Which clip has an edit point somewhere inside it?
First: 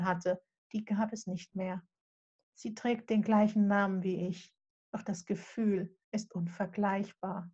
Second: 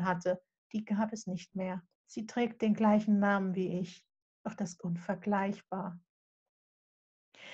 second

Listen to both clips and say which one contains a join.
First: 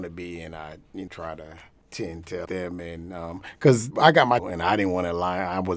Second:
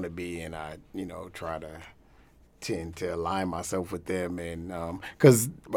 first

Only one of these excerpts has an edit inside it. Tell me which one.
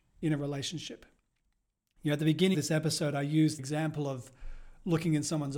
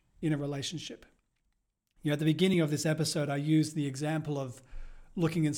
first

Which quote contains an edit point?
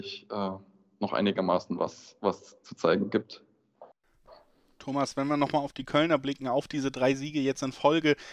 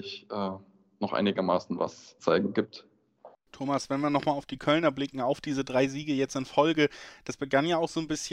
second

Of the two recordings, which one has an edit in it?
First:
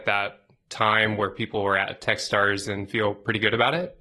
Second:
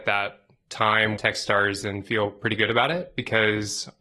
second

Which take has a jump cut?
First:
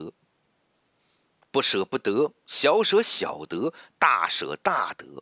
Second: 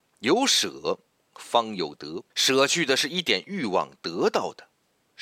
second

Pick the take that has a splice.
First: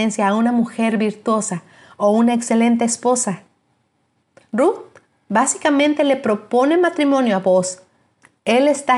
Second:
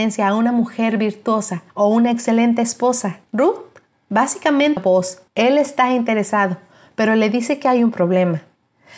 second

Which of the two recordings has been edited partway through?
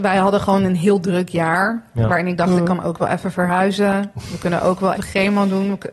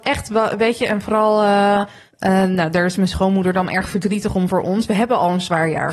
first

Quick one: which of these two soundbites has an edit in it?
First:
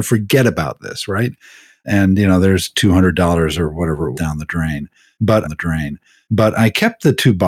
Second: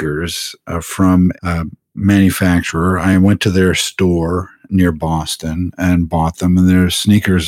first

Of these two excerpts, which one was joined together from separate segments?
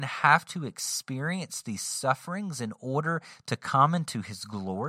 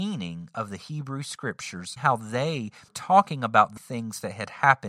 second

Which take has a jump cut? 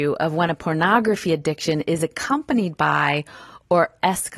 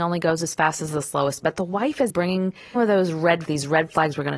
second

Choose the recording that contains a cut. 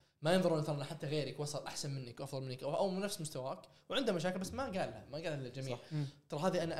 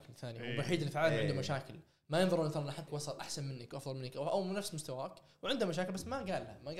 second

